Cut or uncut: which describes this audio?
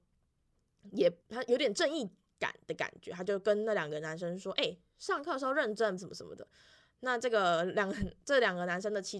cut